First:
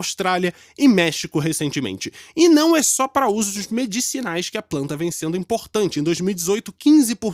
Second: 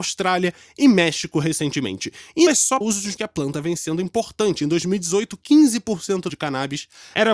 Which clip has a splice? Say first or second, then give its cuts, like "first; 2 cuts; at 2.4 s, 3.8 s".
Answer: second; 4 cuts; at 2.5 s, 2.8 s, 3.2 s, 6.3 s